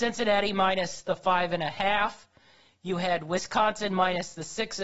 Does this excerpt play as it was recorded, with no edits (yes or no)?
yes